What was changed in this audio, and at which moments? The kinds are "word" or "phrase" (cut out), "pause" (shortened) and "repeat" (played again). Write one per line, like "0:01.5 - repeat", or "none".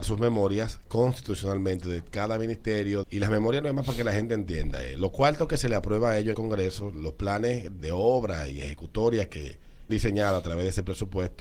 0:03.0 - word
0:06.3 - phrase
0:07.8 - word
0:09.9 - word